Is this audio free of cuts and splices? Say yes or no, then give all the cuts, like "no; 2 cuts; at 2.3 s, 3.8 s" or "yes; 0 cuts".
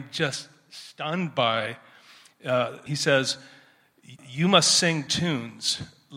no; 3 cuts; at 2.9 s, 4.2 s, 5.1 s